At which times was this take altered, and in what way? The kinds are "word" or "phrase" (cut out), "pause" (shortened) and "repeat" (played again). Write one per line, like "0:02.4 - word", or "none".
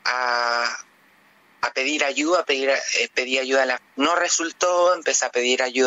0:03.8 - phrase